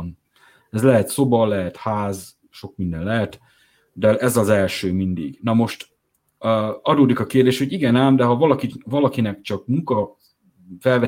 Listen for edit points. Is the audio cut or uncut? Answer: uncut